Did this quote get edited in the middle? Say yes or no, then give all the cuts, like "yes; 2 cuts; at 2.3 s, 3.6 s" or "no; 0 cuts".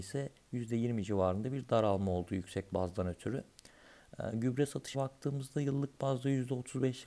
yes; 1 cut; at 4.9 s